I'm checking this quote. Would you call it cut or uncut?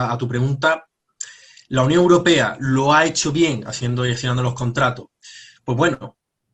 uncut